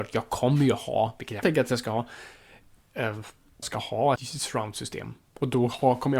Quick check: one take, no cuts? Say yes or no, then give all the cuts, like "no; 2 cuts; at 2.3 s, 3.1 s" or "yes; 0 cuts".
no; 3 cuts; at 1.4 s, 3.6 s, 4.2 s